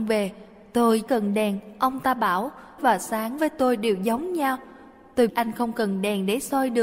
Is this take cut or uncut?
cut